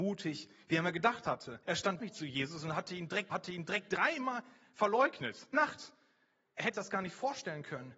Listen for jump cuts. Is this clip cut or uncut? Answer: cut